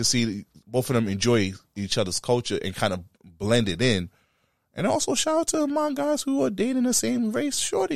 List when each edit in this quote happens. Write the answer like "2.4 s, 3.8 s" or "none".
none